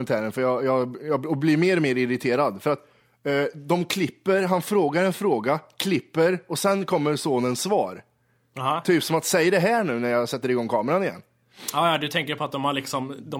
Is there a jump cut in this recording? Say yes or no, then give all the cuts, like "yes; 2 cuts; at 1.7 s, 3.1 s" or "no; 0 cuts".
no; 0 cuts